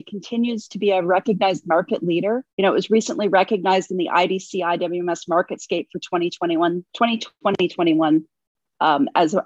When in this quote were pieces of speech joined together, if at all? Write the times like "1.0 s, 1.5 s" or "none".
2.5 s, 6.9 s